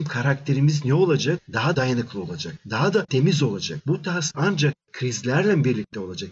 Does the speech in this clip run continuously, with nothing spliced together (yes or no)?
no